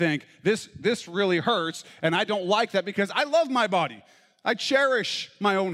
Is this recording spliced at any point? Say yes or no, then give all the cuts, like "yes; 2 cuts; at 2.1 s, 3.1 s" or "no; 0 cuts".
no; 0 cuts